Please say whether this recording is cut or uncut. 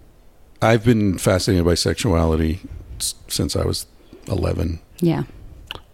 uncut